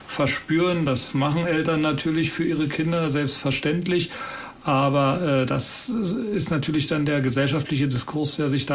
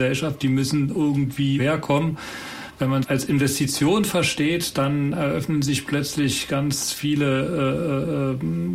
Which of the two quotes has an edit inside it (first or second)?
second